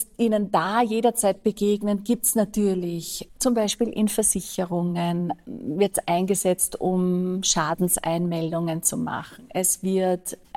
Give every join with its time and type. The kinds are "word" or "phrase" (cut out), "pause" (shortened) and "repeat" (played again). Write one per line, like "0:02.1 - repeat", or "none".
none